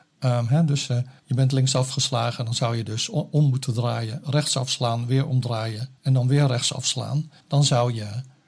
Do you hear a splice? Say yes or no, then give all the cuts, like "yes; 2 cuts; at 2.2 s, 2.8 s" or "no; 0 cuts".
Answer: yes; 3 cuts; at 1.2 s, 6.0 s, 7.4 s